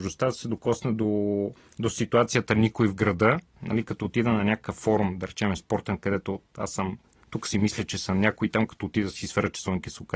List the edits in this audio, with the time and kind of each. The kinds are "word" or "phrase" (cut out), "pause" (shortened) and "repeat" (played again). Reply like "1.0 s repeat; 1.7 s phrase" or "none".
1.6 s pause